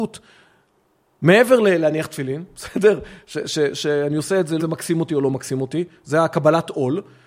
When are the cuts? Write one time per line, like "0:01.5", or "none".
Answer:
0:04.6